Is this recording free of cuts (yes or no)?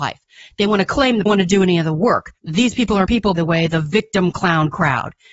no